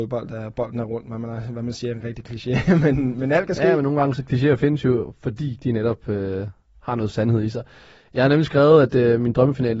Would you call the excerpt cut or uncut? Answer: uncut